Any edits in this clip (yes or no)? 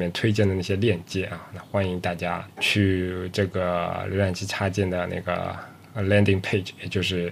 no